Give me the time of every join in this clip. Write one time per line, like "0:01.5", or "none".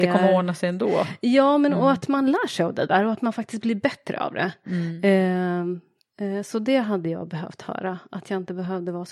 none